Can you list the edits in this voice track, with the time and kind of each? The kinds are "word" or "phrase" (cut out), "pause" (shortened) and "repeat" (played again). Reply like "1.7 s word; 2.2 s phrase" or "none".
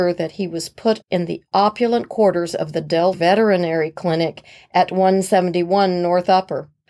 1.0 s word; 3.1 s word